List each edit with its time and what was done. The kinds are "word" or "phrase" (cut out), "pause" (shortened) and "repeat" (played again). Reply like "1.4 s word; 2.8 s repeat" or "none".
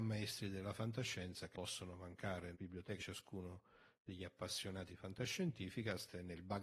1.5 s word; 2.5 s word; 3.0 s word; 4.9 s word

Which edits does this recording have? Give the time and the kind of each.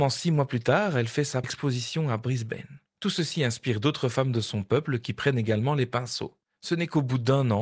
1.4 s word; 2.9 s pause

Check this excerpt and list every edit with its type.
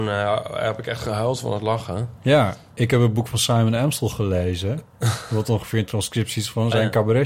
none

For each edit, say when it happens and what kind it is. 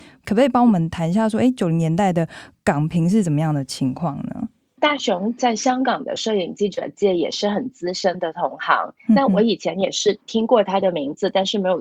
none

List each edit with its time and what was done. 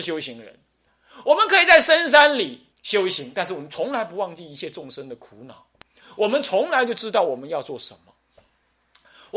2.7 s pause

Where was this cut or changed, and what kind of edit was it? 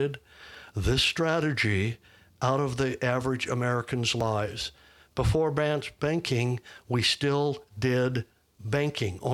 none

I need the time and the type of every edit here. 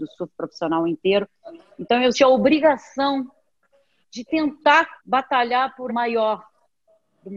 2.1 s word; 4.0 s phrase; 5.0 s pause; 5.9 s word

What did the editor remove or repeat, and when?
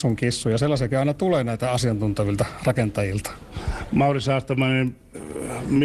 none

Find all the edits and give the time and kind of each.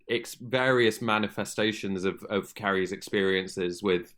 none

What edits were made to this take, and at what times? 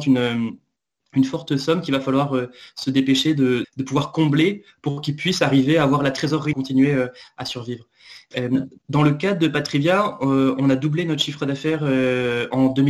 3.6 s word; 6.5 s phrase; 8.8 s pause

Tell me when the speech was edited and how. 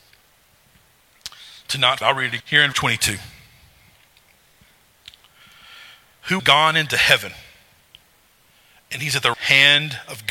2.0 s word; 2.4 s word; 2.7 s word; 6.4 s word; 9.3 s word

